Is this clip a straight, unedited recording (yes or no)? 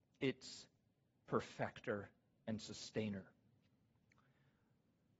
yes